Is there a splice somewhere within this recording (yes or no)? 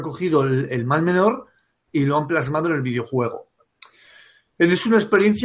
no